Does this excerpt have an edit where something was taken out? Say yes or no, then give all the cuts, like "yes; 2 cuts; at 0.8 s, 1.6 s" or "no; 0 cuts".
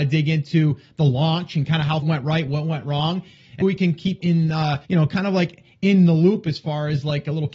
yes; 4 cuts; at 2.0 s, 3.6 s, 4.2 s, 4.8 s